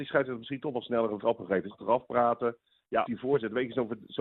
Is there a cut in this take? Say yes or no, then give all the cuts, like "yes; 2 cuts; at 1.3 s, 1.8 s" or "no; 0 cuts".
yes; 3 cuts; at 1.2 s, 1.7 s, 3.0 s